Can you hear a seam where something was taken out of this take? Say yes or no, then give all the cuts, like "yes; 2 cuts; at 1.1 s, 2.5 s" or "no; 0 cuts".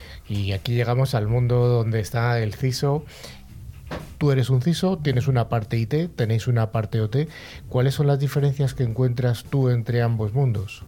yes; 1 cut; at 3.5 s